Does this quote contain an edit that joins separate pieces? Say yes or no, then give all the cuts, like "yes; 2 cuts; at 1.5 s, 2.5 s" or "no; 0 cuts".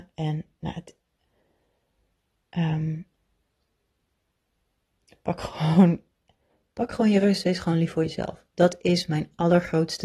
no; 0 cuts